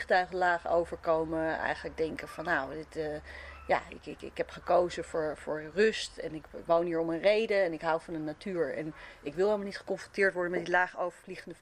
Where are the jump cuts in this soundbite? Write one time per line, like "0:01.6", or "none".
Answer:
none